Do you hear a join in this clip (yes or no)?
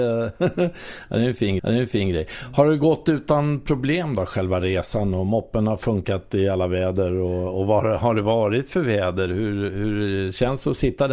yes